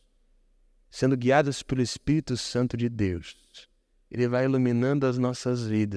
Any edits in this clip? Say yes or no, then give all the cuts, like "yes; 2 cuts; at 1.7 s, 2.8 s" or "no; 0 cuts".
no; 0 cuts